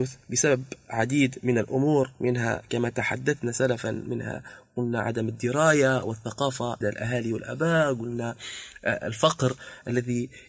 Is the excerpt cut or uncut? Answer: cut